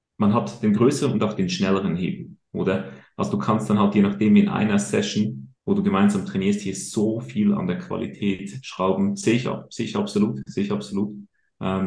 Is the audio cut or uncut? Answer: cut